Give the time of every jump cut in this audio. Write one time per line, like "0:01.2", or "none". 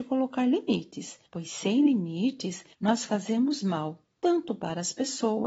0:01.3
0:02.7

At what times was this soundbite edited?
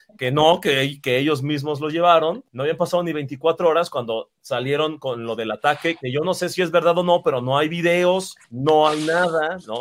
0:02.5
0:08.4

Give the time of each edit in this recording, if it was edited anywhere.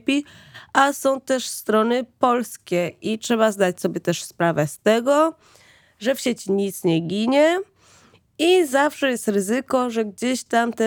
none

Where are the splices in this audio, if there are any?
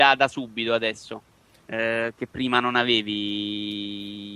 none

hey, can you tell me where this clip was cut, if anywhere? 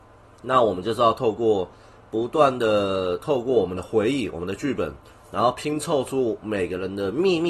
none

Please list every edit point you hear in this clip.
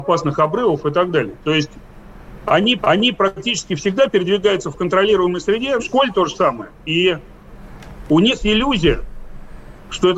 0:02.8
0:05.8
0:08.4

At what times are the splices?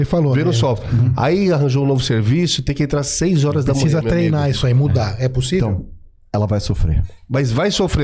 none

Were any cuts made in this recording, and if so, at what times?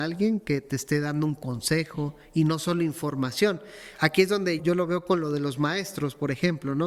0:04.6

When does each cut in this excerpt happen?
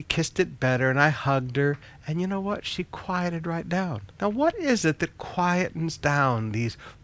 0:04.1

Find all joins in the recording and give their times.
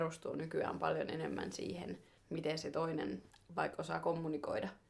none

